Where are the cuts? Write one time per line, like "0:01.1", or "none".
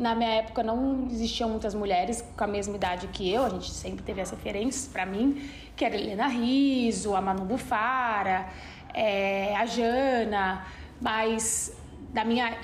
none